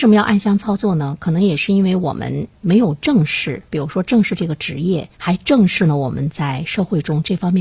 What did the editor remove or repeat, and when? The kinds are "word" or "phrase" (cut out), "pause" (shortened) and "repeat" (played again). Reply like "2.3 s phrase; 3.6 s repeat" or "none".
5.1 s pause

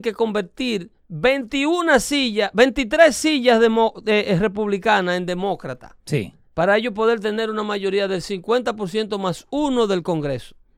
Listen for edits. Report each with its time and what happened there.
1.0 s pause; 6.0 s pause

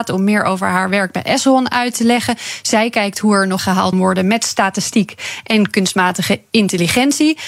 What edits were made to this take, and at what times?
3.6 s phrase; 3.9 s word

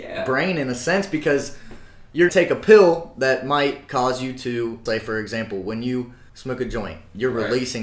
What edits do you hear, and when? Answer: 2.3 s word; 4.9 s phrase; 6.3 s pause

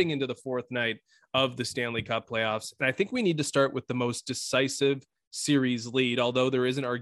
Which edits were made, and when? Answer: none

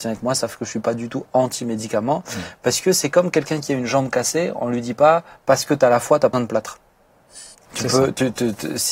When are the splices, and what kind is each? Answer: 6.3 s word; 7.5 s pause

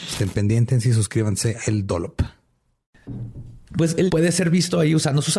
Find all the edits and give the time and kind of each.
1.6 s word; 3.7 s pause; 4.1 s word

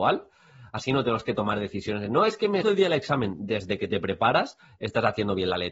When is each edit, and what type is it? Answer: 2.6 s word

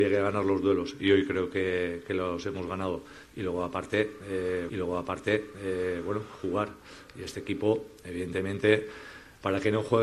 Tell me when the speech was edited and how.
4.7 s repeat

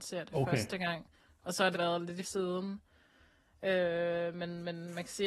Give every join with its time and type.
1.2 s pause; 1.7 s word; 2.2 s word

